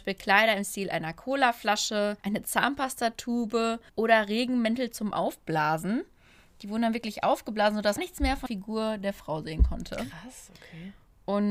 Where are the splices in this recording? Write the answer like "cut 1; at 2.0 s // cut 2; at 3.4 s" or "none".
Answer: cut 1; at 2.2 s // cut 2; at 3.9 s // cut 3; at 8.0 s // cut 4; at 8.5 s